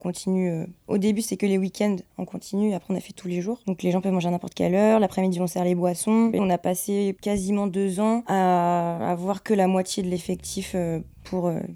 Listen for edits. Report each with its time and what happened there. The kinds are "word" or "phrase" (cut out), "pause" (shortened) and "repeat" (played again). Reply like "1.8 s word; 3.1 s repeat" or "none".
6.4 s phrase

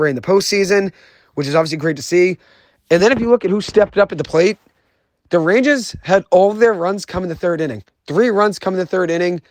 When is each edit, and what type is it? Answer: none

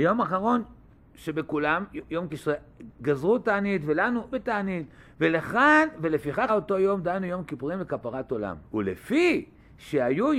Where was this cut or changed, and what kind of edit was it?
2.3 s phrase; 4.3 s word; 6.5 s word; 8.6 s pause

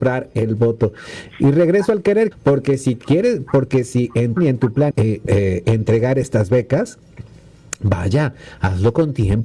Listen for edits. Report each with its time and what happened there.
2.3 s word; 4.4 s word; 4.9 s word; 5.3 s word

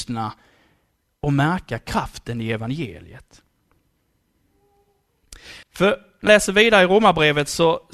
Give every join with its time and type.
5.6 s pause; 6.3 s word

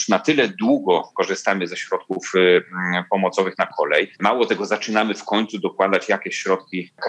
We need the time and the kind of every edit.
4.1 s pause

